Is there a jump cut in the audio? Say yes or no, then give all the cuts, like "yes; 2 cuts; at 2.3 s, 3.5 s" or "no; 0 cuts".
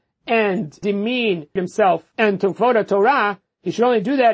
no; 0 cuts